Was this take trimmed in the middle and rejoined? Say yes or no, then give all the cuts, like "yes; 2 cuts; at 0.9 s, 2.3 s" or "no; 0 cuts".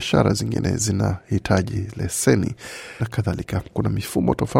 yes; 2 cuts; at 3.0 s, 3.7 s